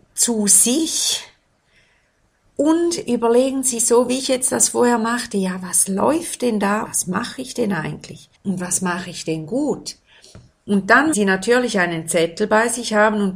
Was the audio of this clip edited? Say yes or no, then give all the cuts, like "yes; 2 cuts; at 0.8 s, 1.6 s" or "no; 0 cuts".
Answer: yes; 4 cuts; at 3.8 s, 6.8 s, 8.3 s, 11.1 s